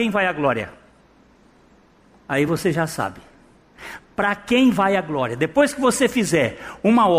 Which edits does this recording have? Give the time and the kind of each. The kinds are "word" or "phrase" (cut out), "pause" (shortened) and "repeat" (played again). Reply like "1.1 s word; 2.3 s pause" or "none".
none